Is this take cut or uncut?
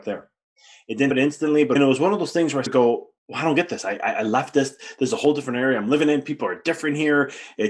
cut